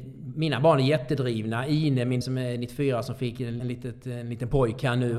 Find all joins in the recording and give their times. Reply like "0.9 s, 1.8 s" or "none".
2.2 s, 3.6 s